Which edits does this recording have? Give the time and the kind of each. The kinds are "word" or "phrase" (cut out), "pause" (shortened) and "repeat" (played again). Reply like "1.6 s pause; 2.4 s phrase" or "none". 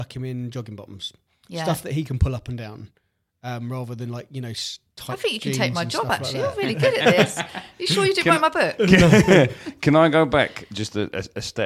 none

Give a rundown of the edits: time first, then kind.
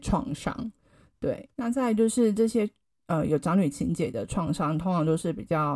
1.5 s pause

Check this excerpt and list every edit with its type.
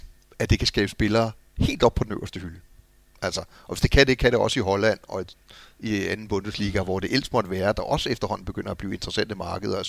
none

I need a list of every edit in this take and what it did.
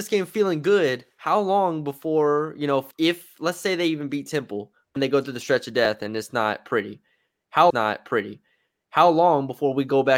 2.9 s word; 5.0 s word; 7.7 s repeat

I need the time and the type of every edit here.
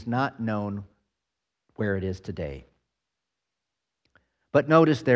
none

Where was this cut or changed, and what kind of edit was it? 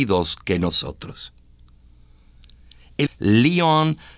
3.1 s word

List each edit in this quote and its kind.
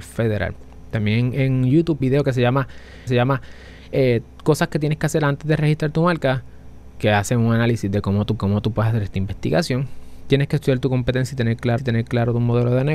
2.0 s phrase; 3.1 s repeat; 8.4 s repeat; 11.8 s repeat

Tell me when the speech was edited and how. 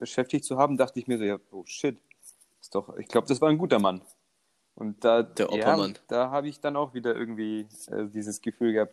none

